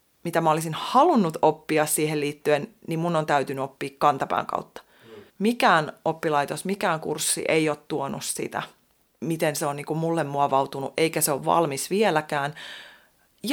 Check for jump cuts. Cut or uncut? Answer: cut